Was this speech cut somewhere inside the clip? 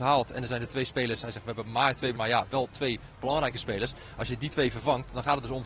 yes; 1 cut; at 2.1 s

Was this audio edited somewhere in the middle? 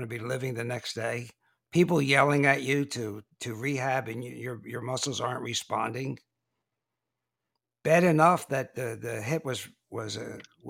no; 0 cuts

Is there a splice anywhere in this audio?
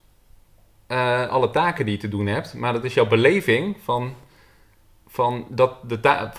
no; 0 cuts

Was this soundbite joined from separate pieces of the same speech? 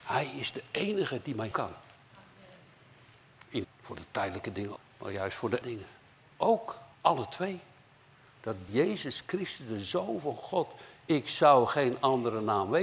yes; 6 cuts; at 1.5 s, 3.6 s, 4.8 s, 5.6 s, 6.9 s, 8.7 s

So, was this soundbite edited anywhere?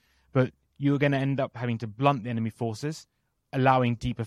no; 0 cuts

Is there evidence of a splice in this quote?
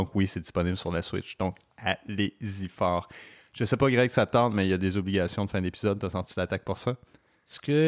no; 0 cuts

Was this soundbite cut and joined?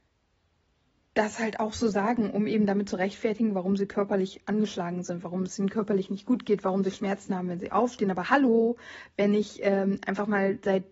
no; 0 cuts

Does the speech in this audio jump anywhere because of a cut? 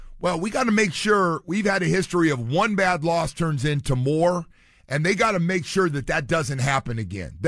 no; 0 cuts

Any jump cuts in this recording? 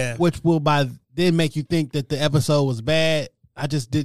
no; 0 cuts

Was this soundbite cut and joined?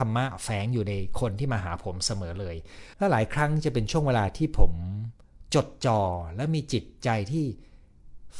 yes; 1 cut; at 2.9 s

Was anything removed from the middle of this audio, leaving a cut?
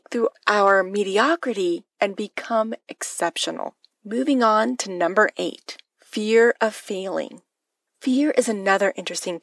yes; 1 cut; at 3.9 s

